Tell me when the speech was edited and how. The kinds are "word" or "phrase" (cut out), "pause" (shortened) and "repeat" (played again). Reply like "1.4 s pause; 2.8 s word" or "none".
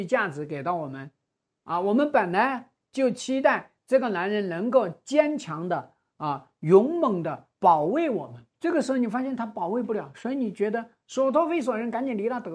1.5 s pause; 7.5 s pause; 8.5 s pause